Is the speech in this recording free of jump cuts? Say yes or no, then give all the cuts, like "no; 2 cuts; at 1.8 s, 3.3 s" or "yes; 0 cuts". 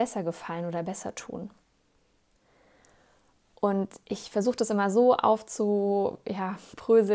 yes; 0 cuts